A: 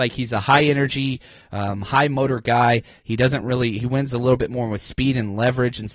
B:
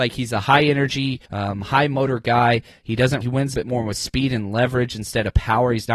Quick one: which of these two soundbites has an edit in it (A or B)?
B